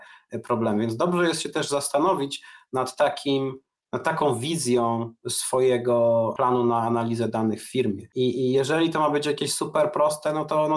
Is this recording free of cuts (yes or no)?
yes